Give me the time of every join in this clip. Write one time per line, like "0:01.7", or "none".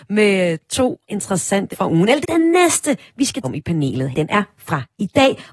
0:01.1
0:01.7
0:02.2
0:03.4
0:04.1